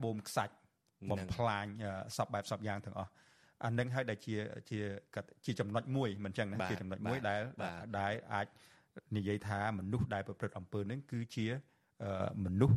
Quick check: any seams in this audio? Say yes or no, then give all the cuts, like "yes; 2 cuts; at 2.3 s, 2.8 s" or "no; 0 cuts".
no; 0 cuts